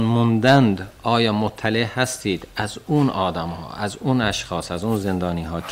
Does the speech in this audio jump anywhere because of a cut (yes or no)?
no